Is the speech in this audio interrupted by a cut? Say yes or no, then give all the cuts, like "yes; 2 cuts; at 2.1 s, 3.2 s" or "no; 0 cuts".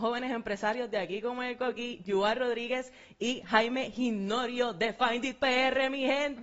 no; 0 cuts